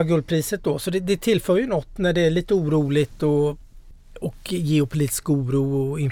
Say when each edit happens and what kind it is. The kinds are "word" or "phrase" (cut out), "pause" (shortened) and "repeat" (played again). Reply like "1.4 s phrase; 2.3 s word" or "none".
none

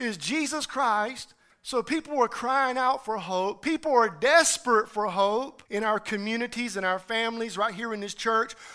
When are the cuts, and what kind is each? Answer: 1.5 s pause; 5.7 s pause

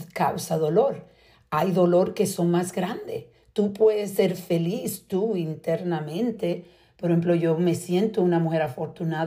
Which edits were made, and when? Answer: none

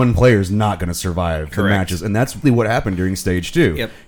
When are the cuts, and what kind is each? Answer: 2.4 s word

